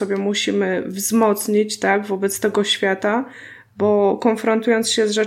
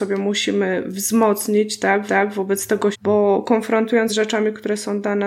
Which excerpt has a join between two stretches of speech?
second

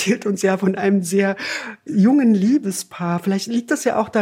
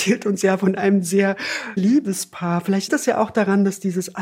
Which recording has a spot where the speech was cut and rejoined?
second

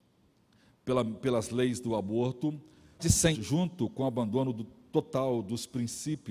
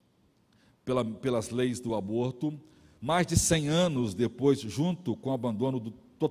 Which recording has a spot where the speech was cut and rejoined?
first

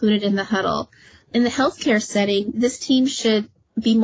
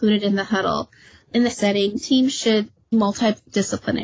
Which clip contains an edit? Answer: second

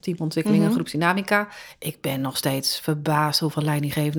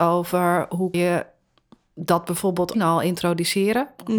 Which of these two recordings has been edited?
second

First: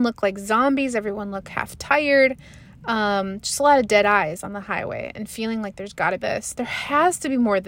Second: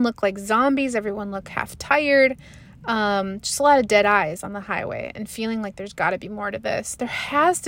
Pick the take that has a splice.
first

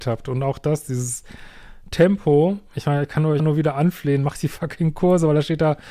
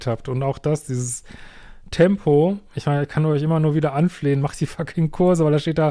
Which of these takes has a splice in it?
first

